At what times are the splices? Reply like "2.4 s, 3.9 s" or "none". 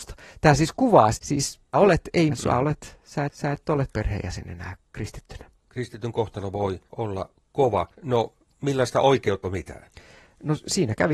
1.1 s, 1.7 s, 2.3 s, 3.3 s, 3.9 s, 6.9 s, 7.9 s, 9.4 s